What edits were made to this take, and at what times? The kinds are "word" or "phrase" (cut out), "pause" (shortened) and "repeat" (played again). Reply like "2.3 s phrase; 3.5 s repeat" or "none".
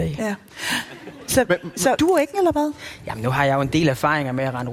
2.0 s word; 2.3 s word